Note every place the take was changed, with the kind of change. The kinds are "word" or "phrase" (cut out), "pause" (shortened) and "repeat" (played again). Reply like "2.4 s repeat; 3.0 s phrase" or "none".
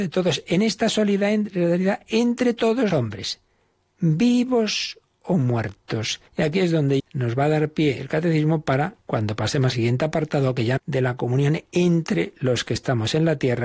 2.9 s word; 6.3 s pause; 7.0 s word; 9.0 s pause; 9.7 s word; 10.8 s phrase